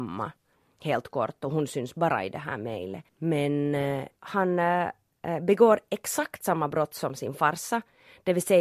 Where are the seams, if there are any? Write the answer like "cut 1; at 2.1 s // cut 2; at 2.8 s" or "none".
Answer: cut 1; at 3.1 s // cut 2; at 4.2 s